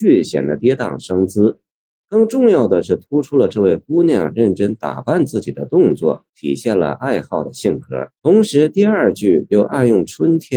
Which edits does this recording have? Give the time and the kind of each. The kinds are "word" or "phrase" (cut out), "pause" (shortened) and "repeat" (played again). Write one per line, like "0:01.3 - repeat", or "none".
0:06.3 - pause
0:08.2 - pause